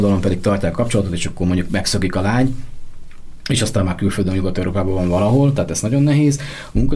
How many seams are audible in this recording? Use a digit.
0